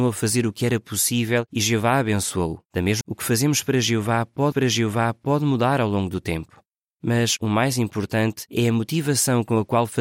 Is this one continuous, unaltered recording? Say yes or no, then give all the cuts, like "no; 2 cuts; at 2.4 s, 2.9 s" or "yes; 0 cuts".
no; 4 cuts; at 2.7 s, 3.0 s, 4.5 s, 6.8 s